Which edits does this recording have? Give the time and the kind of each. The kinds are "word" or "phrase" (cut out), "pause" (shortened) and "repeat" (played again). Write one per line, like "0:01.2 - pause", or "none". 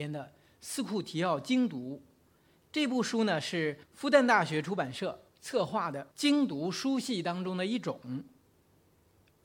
0:03.8 - pause
0:05.3 - pause
0:06.1 - pause